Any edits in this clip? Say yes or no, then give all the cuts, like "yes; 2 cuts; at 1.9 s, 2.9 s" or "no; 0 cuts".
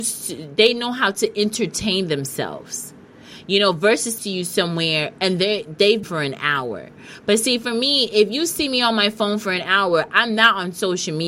yes; 2 cuts; at 4.2 s, 6.0 s